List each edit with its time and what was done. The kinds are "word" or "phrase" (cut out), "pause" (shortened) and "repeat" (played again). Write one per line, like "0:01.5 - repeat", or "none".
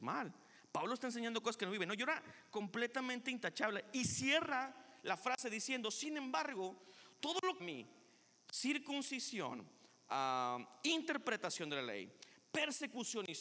0:07.6 - phrase